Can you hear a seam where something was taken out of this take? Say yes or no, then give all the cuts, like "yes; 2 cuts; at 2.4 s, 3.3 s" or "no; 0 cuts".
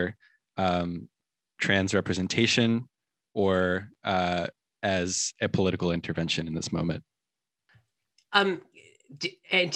no; 0 cuts